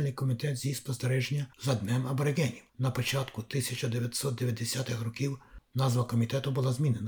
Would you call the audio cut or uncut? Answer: cut